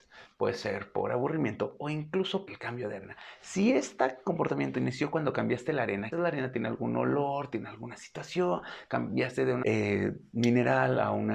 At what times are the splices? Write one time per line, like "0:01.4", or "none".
0:02.5
0:06.1
0:09.6